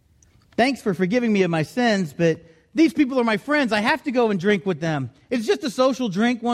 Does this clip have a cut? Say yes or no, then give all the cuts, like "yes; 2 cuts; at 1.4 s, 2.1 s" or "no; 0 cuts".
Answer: no; 0 cuts